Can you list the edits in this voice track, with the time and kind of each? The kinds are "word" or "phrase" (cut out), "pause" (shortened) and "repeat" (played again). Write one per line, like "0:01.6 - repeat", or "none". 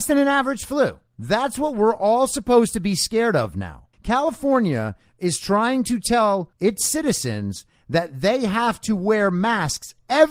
0:01.1 - pause
0:03.9 - pause
0:06.5 - pause